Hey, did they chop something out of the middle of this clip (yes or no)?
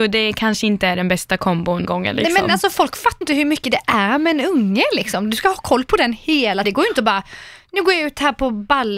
yes